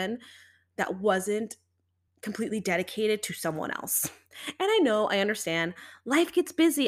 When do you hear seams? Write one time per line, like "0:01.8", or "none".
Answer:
none

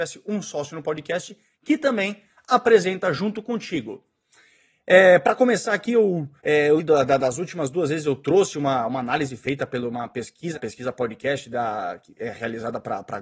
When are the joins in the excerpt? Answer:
0:06.4
0:06.8
0:10.5

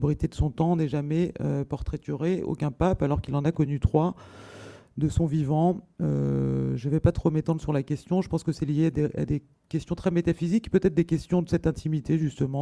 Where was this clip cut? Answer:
0:05.9
0:09.5

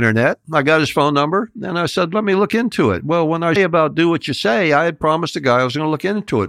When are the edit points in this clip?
0:03.6

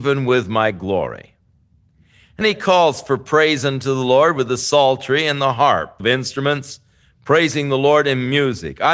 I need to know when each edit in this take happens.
0:02.4
0:06.0

